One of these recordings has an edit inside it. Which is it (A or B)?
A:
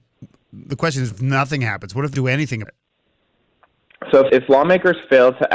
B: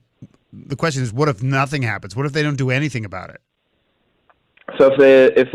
A